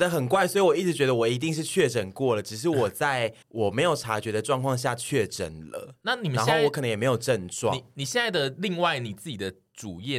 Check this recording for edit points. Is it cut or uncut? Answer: cut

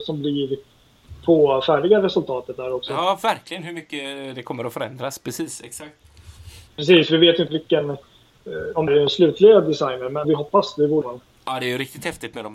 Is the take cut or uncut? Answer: cut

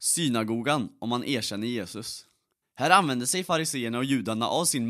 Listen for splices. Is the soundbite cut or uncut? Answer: cut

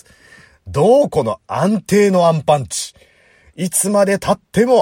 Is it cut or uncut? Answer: uncut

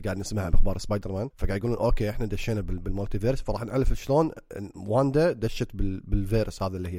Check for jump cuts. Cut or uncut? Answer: uncut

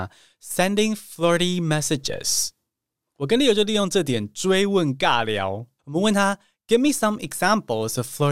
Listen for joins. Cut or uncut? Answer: uncut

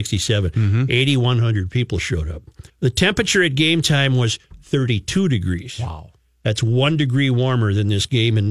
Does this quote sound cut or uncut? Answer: cut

